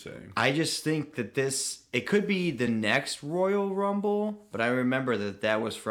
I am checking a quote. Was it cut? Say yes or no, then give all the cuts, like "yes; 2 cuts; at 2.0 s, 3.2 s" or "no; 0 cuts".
no; 0 cuts